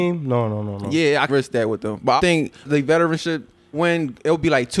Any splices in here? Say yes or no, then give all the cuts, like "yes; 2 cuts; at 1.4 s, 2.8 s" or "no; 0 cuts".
yes; 4 cuts; at 1.3 s, 2.2 s, 2.7 s, 3.7 s